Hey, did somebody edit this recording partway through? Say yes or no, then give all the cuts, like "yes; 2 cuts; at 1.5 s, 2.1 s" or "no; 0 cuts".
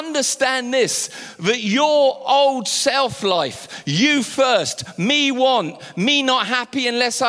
no; 0 cuts